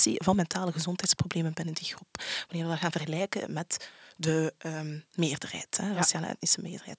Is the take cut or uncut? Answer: uncut